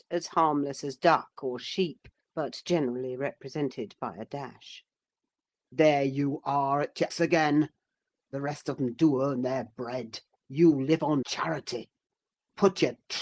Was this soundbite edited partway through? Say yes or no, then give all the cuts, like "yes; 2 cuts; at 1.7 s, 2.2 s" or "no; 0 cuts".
yes; 3 cuts; at 2.2 s, 7.1 s, 11.2 s